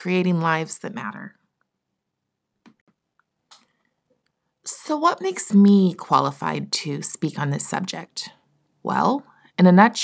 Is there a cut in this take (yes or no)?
no